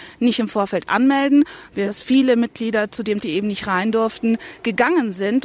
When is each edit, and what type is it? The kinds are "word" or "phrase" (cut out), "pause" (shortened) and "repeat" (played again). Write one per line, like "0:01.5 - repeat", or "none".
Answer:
0:01.9 - word
0:03.2 - word

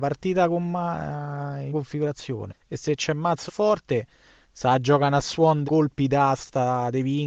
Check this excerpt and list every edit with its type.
0:01.7 - word
0:02.5 - word
0:03.5 - word
0:05.6 - word

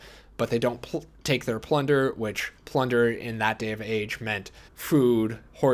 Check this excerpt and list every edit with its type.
0:02.6 - pause
0:04.7 - pause

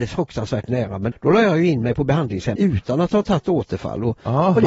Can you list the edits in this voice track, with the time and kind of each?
0:01.1 - word
0:02.6 - word

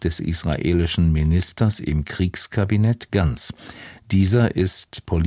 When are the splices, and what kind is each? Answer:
none

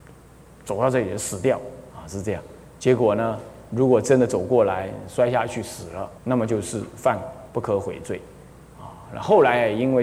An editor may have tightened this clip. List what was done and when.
0:01.9 - pause
0:06.2 - pause
0:07.5 - pause

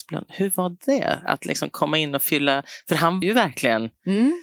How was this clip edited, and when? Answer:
0:03.2 - word

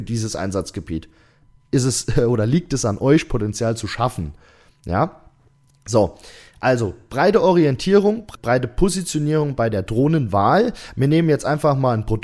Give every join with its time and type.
none

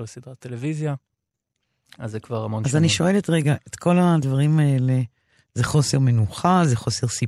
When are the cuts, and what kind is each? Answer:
none

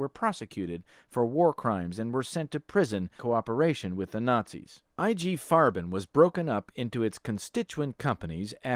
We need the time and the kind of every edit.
0:03.2 - phrase
0:04.9 - pause

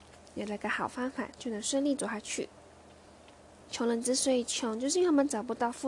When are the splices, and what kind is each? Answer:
none

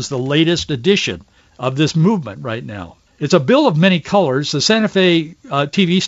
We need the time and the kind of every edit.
0:01.4 - pause
0:03.1 - pause

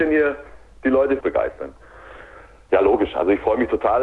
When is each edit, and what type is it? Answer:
0:01.2 - word

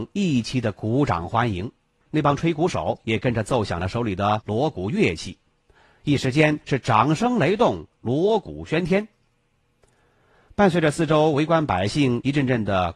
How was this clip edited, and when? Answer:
none

